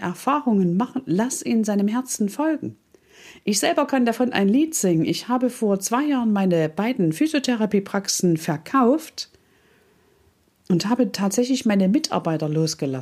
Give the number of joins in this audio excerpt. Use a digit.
0